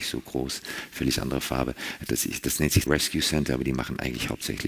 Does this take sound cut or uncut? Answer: cut